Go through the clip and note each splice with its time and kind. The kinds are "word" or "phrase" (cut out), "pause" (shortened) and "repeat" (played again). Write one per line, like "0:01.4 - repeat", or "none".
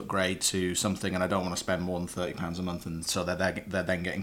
none